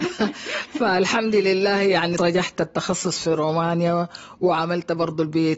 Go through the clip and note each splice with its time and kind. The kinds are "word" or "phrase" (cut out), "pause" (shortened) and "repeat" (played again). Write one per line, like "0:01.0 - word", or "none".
0:02.2 - word
0:02.6 - word